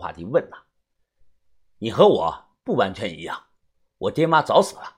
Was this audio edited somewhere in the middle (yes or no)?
no